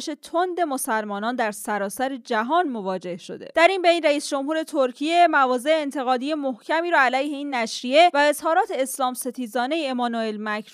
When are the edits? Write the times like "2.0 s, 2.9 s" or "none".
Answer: none